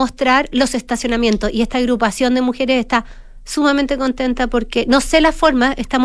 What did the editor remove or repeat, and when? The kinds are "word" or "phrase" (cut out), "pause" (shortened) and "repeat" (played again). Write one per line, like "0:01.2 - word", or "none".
none